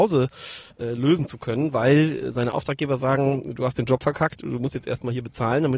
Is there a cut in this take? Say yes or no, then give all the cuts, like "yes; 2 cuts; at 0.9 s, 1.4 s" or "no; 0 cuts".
no; 0 cuts